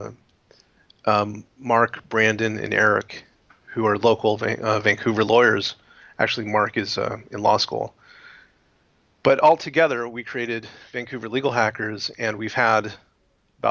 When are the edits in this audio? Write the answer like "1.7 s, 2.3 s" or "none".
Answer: 1.5 s